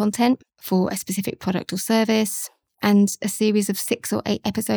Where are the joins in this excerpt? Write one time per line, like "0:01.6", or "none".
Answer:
none